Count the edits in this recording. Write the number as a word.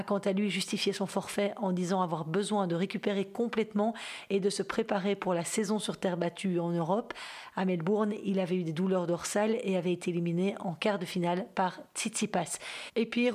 zero